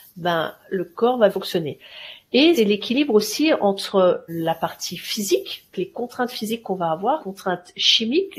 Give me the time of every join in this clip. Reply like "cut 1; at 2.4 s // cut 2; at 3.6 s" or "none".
cut 1; at 1.3 s // cut 2; at 2.6 s // cut 3; at 4.3 s // cut 4; at 5.7 s // cut 5; at 7.2 s